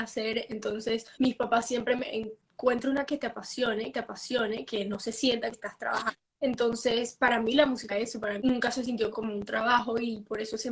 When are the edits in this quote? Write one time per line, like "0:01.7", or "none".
0:01.1
0:02.0
0:03.1
0:03.9
0:05.5
0:06.3
0:07.9
0:08.4
0:09.1

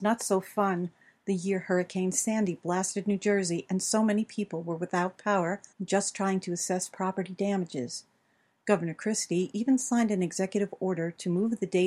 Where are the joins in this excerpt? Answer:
0:05.7

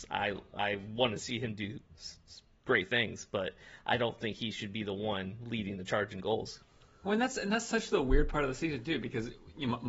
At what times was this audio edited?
none

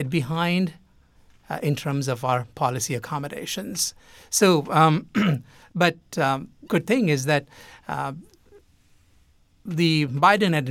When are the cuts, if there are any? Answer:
0:06.7

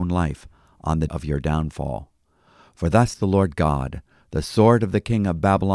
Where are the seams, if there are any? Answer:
0:01.1
0:03.1

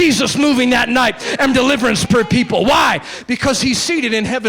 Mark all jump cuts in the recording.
0:01.5

